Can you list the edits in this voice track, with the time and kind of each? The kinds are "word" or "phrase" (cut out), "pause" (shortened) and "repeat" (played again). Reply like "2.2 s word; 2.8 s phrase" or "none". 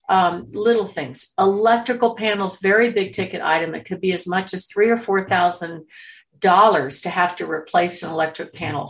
none